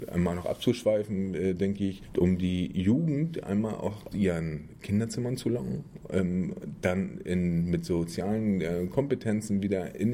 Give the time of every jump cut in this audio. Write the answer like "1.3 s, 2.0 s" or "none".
4.1 s